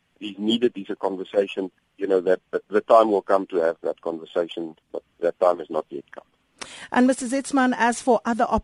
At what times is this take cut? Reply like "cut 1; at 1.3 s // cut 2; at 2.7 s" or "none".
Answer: cut 1; at 1.8 s // cut 2; at 4.8 s